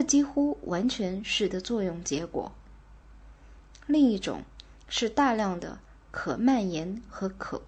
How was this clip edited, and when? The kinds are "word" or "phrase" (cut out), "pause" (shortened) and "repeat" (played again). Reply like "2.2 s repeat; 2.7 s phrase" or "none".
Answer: 1.5 s word